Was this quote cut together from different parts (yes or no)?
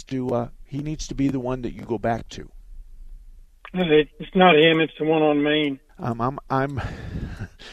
yes